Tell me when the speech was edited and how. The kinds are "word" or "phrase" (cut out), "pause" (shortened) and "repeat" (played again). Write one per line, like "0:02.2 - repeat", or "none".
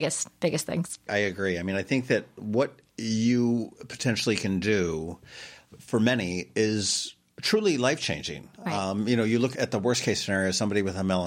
0:02.9 - pause
0:08.5 - pause
0:09.5 - word